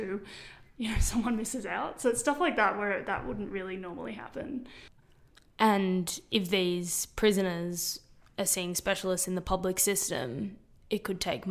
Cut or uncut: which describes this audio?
uncut